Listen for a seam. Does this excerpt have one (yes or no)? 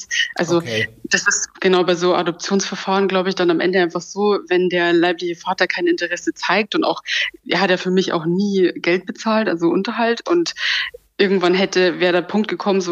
no